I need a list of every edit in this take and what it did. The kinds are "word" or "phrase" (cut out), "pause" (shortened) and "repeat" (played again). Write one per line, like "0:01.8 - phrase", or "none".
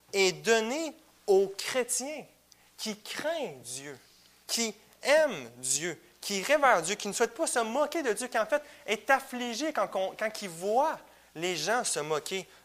none

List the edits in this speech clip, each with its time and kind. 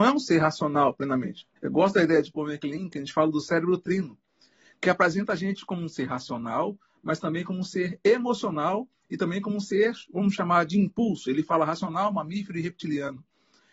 0:01.6 - pause

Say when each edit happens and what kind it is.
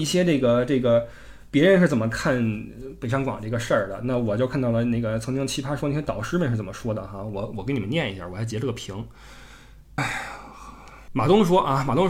0:10.0 - word

